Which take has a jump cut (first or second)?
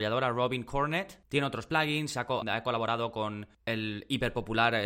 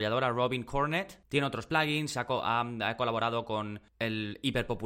first